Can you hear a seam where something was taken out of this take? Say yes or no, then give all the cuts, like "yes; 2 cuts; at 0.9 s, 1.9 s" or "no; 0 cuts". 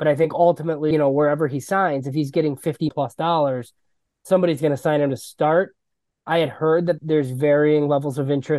yes; 3 cuts; at 0.9 s, 2.9 s, 7.0 s